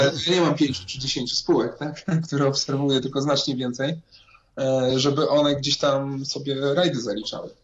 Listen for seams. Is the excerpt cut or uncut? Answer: uncut